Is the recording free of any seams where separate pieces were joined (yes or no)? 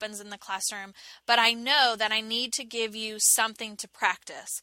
yes